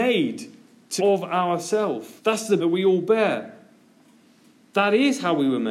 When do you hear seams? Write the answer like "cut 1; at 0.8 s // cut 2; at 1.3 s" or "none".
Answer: cut 1; at 1.0 s // cut 2; at 2.2 s // cut 3; at 2.6 s